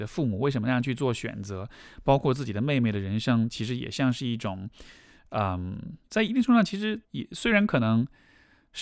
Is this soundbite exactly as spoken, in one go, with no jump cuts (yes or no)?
no